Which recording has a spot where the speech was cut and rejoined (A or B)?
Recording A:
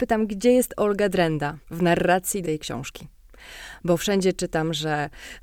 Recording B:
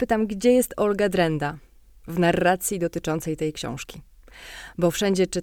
A